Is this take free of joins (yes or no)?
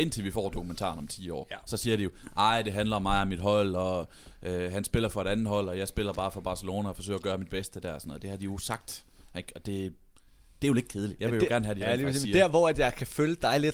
yes